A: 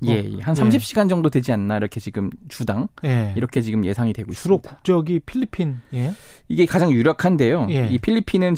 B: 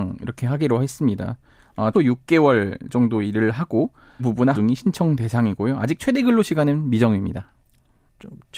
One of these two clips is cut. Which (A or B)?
B